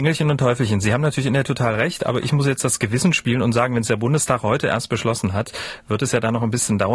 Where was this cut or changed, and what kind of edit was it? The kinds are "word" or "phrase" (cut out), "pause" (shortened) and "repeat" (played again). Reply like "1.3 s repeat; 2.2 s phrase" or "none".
1.4 s word